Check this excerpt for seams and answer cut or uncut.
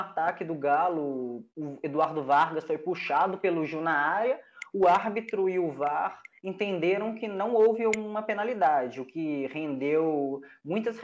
uncut